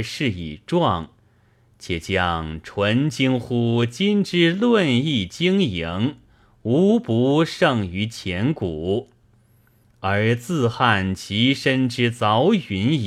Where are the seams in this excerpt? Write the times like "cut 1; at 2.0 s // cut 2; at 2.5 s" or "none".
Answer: none